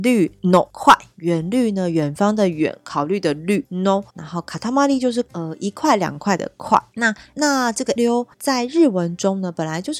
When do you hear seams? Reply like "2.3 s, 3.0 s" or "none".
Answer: 4.1 s, 8.0 s, 8.3 s